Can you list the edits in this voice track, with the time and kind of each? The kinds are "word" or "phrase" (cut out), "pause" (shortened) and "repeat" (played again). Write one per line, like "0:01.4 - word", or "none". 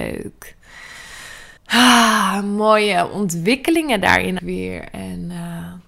0:01.6 - pause
0:04.4 - word